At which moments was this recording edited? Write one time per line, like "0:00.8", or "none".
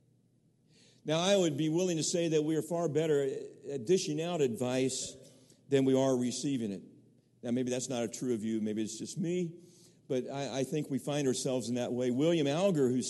none